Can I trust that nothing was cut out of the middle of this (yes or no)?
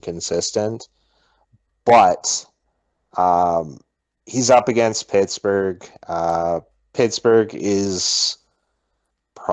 yes